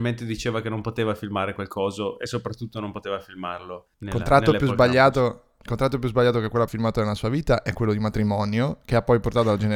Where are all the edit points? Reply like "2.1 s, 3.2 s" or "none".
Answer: 3.9 s, 6.7 s